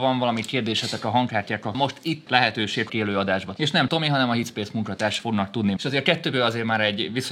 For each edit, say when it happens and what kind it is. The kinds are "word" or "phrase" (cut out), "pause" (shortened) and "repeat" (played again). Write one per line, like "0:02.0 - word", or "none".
0:01.7 - word
0:02.3 - word
0:02.9 - word
0:03.6 - word
0:03.9 - word
0:05.2 - word
0:05.8 - word